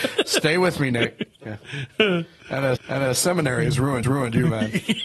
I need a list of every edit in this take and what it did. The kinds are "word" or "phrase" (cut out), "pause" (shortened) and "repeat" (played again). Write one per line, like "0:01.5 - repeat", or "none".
0:01.3 - pause
0:02.8 - repeat
0:04.0 - repeat